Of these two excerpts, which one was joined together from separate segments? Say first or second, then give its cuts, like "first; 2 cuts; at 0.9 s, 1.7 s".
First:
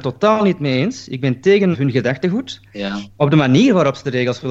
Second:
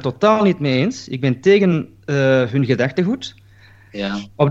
first; 2 cuts; at 1.7 s, 2.6 s